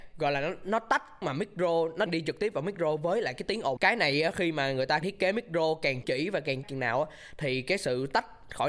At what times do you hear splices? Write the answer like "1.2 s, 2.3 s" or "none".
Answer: 1.2 s, 2.1 s, 3.8 s, 5.0 s, 6.0 s, 6.6 s